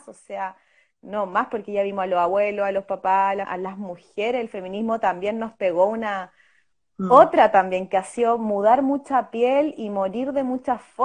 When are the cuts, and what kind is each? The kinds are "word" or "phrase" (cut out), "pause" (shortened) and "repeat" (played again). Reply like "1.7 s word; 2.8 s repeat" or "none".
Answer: 3.4 s word